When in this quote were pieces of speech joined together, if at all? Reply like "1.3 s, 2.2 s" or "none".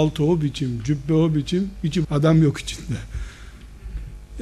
2.0 s